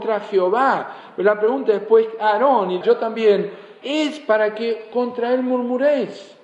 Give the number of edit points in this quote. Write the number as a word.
two